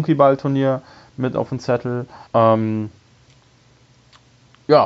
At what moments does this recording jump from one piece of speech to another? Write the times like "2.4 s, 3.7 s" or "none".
2.3 s